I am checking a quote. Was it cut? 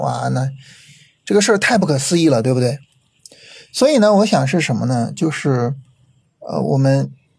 no; 0 cuts

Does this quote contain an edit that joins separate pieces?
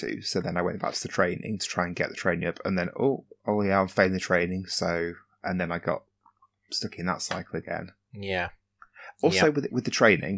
no; 0 cuts

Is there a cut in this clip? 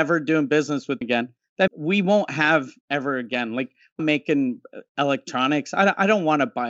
yes; 4 cuts; at 1.0 s, 1.7 s, 2.8 s, 4.0 s

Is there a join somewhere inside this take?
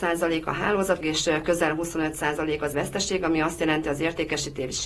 yes; 2 cuts; at 1.0 s, 2.7 s

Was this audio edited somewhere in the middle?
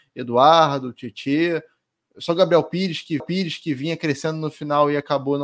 yes; 1 cut; at 3.2 s

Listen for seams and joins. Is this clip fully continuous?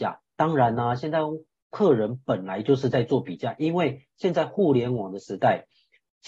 yes; 0 cuts

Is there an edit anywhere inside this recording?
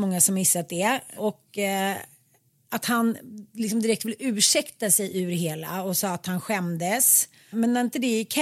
no; 0 cuts

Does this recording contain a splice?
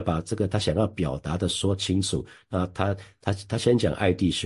no; 0 cuts

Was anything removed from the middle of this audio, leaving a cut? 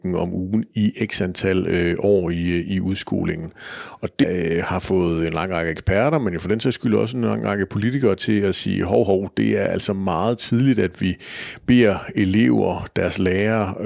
yes; 1 cut; at 4.2 s

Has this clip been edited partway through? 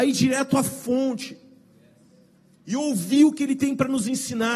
no; 0 cuts

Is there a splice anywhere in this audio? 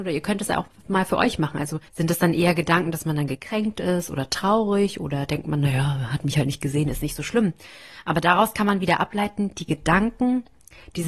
yes; 1 cut; at 1.9 s

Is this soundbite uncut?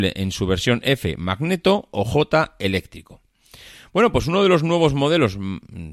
yes; 0 cuts

